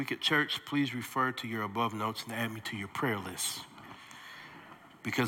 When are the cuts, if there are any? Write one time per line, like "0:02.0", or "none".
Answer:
none